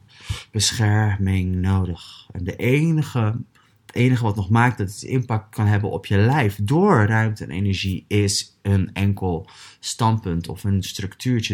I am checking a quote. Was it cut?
yes; 1 cut; at 3.6 s

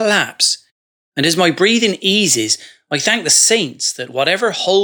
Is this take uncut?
yes; 0 cuts

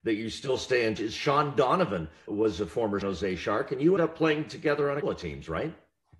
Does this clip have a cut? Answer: yes; 5 cuts; at 1.0 s, 2.3 s, 3.0 s, 4.0 s, 5.0 s

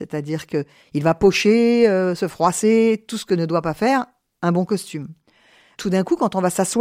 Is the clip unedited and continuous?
yes; 0 cuts

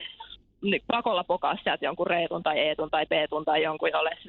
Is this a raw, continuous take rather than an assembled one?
yes; 0 cuts

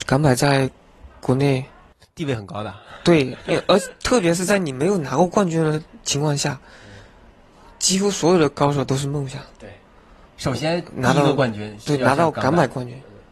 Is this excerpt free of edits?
yes; 0 cuts

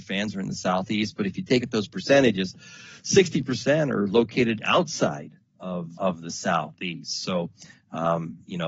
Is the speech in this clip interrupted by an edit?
yes; 2 cuts; at 1.6 s, 6.0 s

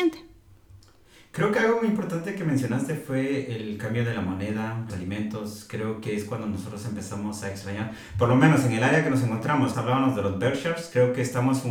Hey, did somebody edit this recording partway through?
yes; 2 cuts; at 4.9 s, 9.7 s

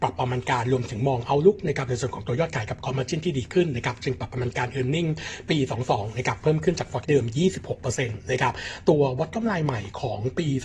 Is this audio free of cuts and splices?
no; 1 cut; at 7.0 s

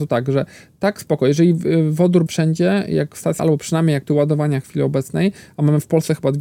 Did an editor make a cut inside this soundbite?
yes; 3 cuts; at 2.3 s, 3.4 s, 4.1 s

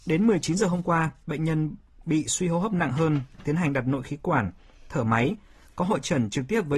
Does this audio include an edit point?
no; 0 cuts

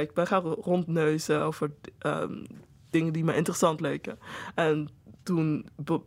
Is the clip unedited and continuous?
yes; 0 cuts

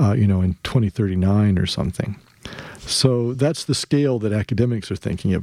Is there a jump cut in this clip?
no; 0 cuts

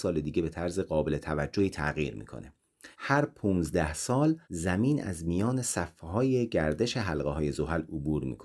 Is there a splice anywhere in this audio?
yes; 2 cuts; at 2.9 s, 4.4 s

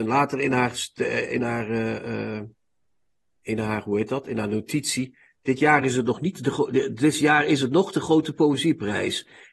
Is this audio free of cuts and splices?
yes; 0 cuts

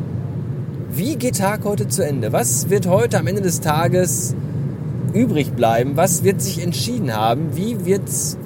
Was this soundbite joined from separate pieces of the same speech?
yes; 2 cuts; at 1.3 s, 5.1 s

